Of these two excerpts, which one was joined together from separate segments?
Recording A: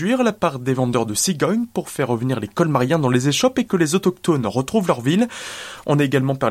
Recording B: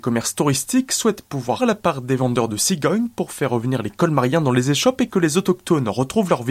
B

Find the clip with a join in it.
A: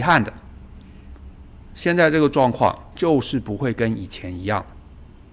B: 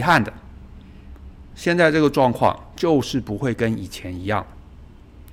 B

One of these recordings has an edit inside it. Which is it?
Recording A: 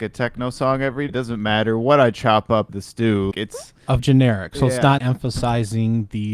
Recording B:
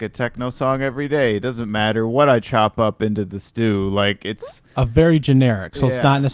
A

